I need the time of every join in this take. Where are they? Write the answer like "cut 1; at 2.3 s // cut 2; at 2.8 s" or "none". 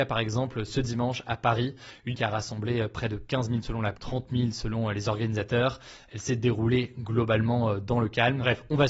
cut 1; at 2.1 s // cut 2; at 3.6 s // cut 3; at 3.9 s